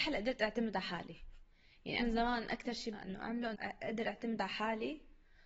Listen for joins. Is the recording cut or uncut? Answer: cut